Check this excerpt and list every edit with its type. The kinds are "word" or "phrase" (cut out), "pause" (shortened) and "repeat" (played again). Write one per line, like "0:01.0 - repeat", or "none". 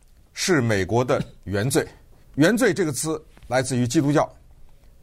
0:02.2 - pause